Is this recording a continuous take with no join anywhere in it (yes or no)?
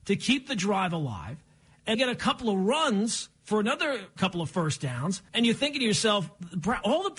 no